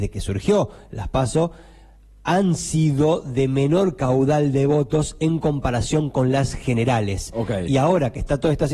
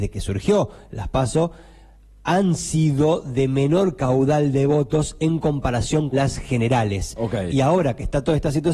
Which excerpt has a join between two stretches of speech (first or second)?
second